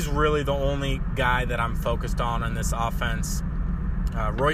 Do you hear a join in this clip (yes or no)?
no